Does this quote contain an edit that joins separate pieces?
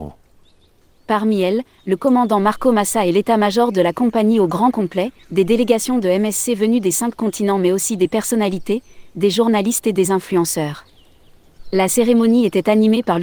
yes; 1 cut; at 5.2 s

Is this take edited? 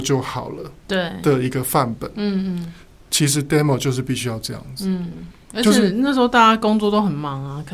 no; 0 cuts

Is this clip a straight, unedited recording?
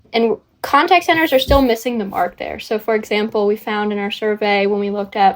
yes; 0 cuts

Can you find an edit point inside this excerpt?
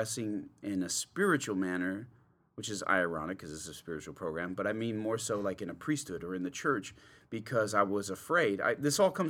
no; 0 cuts

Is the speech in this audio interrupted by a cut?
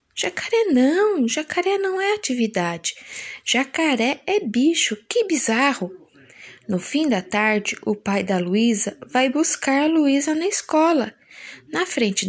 no; 0 cuts

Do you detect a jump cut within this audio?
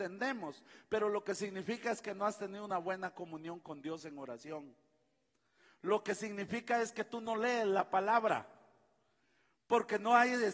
no; 0 cuts

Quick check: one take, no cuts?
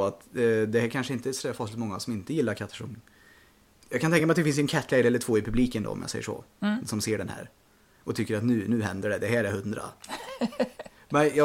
yes; 0 cuts

